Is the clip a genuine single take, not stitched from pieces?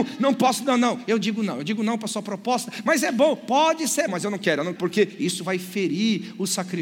no; 2 cuts; at 4.1 s, 4.8 s

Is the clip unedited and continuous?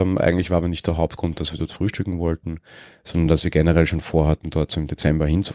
yes; 0 cuts

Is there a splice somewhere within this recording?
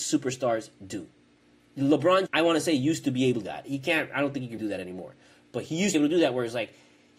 yes; 4 cuts; at 2.3 s, 3.4 s, 4.6 s, 5.9 s

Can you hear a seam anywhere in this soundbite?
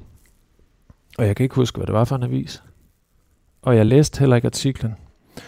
no; 0 cuts

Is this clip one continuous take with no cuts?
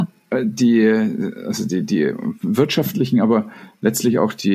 yes; 0 cuts

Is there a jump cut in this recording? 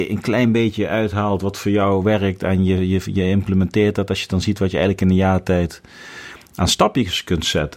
no; 0 cuts

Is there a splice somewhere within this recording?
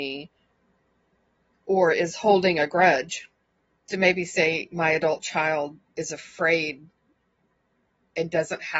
yes; 1 cut; at 3.9 s

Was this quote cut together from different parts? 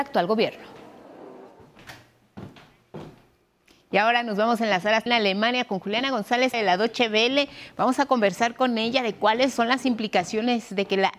yes; 2 cuts; at 5.1 s, 6.5 s

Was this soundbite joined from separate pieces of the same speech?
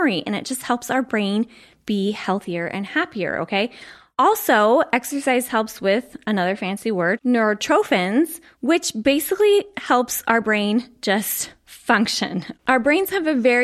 no; 0 cuts

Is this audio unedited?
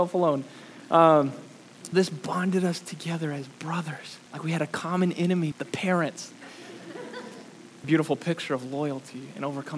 no; 4 cuts; at 1.9 s, 4.3 s, 5.5 s, 7.8 s

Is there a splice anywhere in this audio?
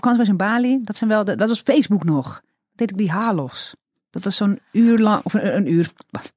no; 0 cuts

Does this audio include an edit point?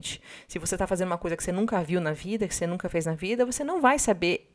no; 0 cuts

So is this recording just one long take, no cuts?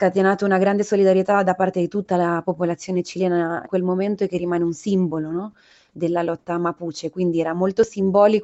no; 1 cut; at 3.7 s

